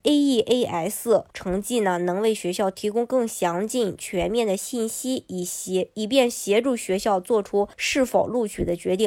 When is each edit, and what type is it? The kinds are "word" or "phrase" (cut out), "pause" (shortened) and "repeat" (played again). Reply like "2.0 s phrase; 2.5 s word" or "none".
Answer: 1.3 s pause; 7.7 s pause